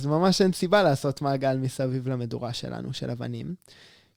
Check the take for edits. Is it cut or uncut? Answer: uncut